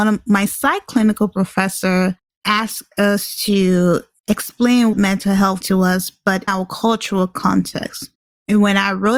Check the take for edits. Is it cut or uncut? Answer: cut